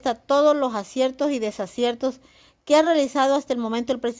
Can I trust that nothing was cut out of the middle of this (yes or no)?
yes